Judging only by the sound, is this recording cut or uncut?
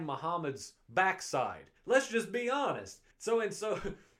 cut